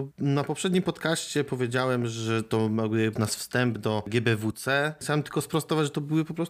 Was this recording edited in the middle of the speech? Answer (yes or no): yes